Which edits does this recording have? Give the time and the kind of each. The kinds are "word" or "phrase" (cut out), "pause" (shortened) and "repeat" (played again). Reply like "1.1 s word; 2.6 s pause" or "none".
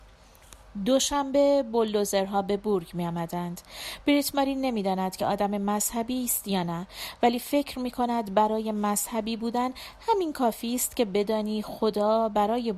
none